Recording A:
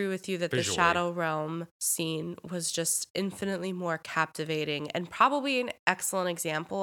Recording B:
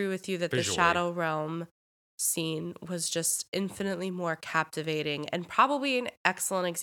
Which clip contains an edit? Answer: A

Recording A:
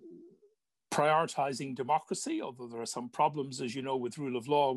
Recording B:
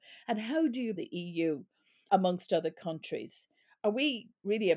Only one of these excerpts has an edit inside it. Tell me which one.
B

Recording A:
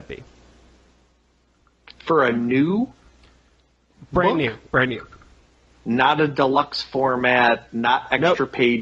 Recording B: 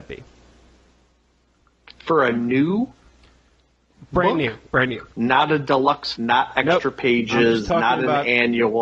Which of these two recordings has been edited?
B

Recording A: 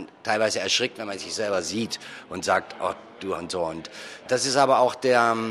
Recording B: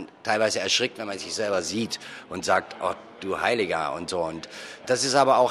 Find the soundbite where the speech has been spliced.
A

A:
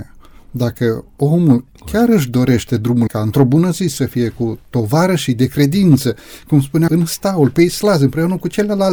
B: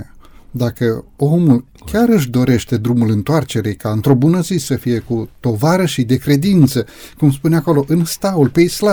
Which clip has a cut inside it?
A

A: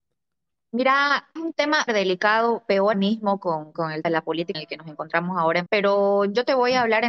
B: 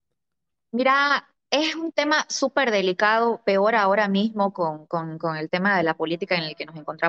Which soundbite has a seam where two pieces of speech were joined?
A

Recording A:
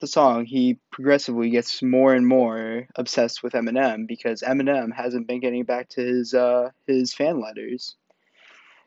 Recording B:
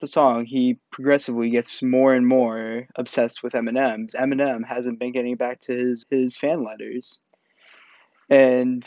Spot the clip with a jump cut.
B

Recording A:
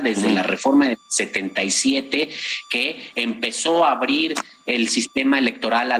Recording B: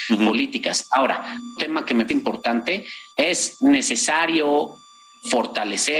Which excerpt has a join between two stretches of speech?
B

